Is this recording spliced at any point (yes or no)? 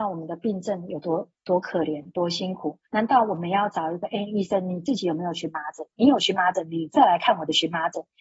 yes